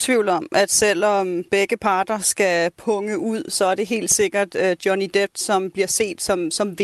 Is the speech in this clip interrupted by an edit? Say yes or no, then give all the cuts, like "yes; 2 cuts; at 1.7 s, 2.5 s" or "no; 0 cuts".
no; 0 cuts